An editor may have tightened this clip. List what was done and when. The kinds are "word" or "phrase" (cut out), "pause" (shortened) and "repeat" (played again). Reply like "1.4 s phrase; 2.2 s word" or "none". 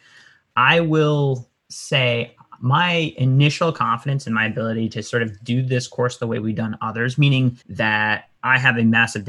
1.6 s pause; 7.6 s pause